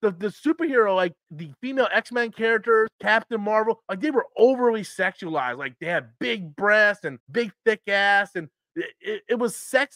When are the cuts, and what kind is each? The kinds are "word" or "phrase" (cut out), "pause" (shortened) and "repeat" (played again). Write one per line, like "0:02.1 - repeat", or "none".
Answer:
0:01.2 - word
0:02.9 - pause
0:07.2 - pause